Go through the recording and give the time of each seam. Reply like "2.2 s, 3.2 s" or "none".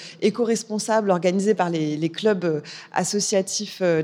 none